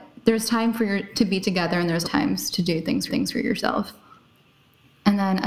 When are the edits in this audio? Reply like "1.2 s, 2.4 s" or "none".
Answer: 2.0 s, 3.1 s